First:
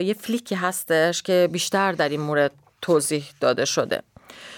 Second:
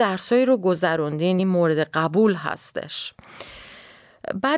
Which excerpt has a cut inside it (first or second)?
second